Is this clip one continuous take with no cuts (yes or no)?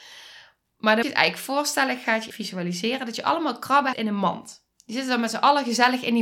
no